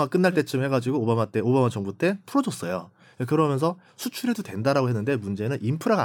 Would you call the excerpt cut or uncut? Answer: uncut